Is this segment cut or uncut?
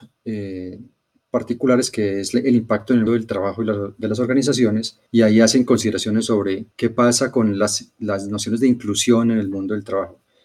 cut